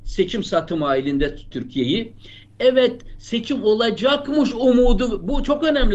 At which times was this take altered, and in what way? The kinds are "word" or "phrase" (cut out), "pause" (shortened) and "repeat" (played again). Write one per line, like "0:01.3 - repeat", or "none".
0:01.5 - word